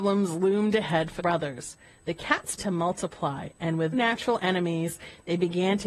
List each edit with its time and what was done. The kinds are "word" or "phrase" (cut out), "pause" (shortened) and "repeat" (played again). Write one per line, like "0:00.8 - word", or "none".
0:01.2 - word
0:02.6 - word
0:03.9 - word